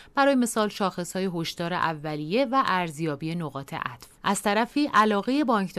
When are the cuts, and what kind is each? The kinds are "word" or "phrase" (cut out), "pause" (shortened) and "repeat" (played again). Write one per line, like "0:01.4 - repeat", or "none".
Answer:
0:04.2 - pause